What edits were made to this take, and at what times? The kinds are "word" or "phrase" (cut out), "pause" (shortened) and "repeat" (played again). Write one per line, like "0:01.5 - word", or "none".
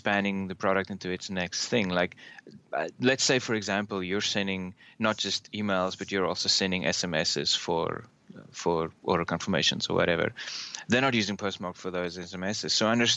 none